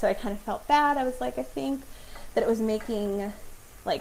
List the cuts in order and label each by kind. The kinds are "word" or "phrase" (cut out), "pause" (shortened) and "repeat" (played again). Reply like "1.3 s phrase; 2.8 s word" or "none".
none